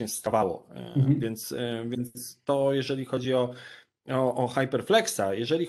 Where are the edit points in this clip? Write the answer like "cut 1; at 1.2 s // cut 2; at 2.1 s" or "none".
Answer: none